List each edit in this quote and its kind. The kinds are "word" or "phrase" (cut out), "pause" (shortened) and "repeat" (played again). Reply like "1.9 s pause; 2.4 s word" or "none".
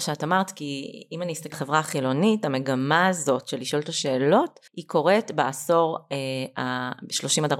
1.5 s word; 4.7 s pause